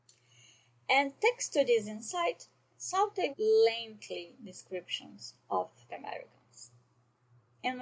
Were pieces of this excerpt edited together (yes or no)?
yes